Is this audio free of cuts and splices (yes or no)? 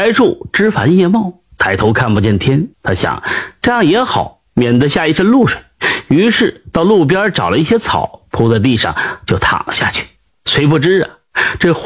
no